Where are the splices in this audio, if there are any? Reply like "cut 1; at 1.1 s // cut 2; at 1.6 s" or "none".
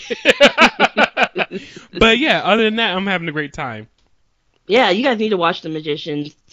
none